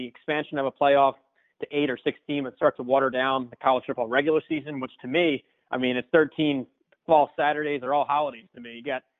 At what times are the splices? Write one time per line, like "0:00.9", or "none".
none